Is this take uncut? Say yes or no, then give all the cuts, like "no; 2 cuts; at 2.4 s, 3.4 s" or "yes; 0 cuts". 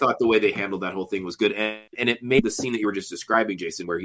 no; 1 cut; at 1.9 s